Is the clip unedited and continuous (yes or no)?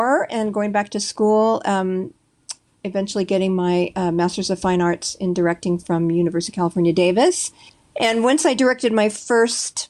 no